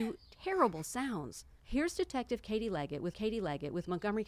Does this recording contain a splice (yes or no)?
yes